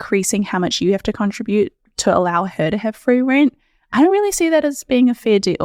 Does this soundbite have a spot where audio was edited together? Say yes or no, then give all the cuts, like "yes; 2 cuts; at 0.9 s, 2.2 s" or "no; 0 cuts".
no; 0 cuts